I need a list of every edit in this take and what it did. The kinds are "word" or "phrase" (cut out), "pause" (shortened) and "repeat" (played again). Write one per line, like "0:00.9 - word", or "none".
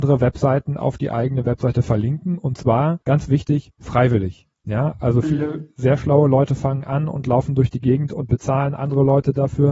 0:03.0 - pause
0:04.5 - pause